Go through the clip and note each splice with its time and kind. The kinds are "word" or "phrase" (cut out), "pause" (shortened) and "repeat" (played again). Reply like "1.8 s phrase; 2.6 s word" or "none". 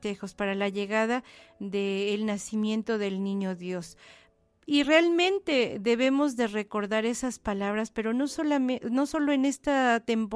none